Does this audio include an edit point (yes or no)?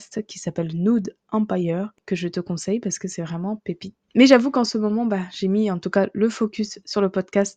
no